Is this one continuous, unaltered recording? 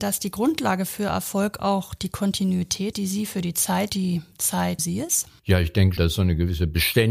no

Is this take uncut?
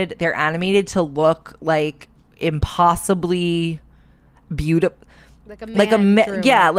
yes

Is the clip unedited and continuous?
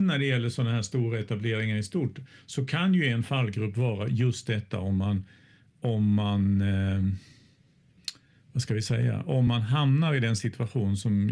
yes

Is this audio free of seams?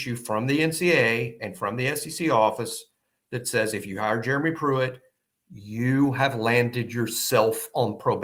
yes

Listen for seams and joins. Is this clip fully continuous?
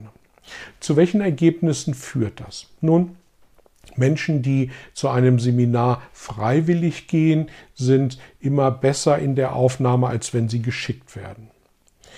yes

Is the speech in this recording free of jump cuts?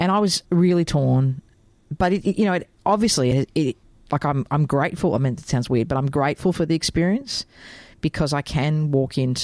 yes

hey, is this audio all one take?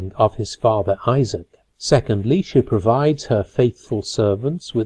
no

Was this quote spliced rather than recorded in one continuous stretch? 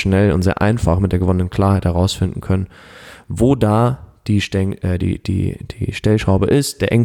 no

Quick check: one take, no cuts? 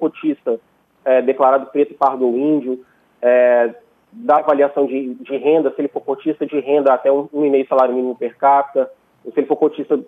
yes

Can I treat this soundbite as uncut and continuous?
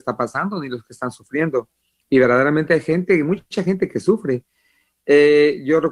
yes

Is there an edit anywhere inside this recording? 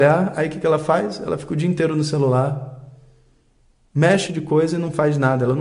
yes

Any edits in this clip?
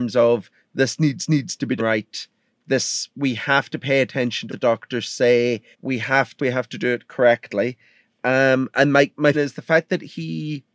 yes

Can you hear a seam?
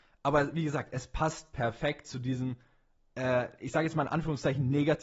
no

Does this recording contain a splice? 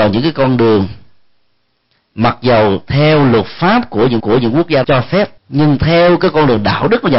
yes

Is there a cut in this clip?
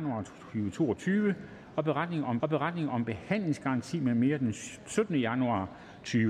yes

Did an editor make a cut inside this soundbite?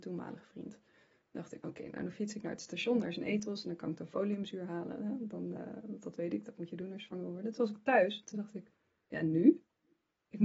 no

